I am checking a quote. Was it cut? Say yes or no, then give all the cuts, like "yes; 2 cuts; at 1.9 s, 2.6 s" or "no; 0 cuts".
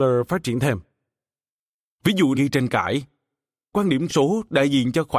yes; 3 cuts; at 2.3 s, 3.7 s, 4.1 s